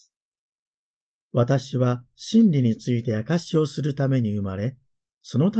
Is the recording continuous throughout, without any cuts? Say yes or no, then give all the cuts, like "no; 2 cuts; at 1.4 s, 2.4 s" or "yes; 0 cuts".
yes; 0 cuts